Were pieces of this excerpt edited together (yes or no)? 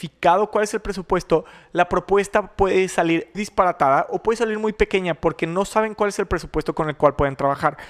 yes